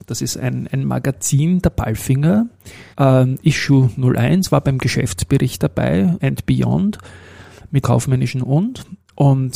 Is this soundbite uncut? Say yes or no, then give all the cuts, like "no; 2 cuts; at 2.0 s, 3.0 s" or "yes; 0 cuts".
no; 3 cuts; at 2.9 s, 6.2 s, 7.8 s